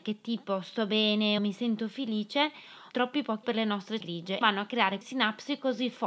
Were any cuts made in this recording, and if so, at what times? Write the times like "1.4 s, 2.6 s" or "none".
1.4 s, 2.9 s, 3.4 s, 4.0 s, 4.4 s, 5.0 s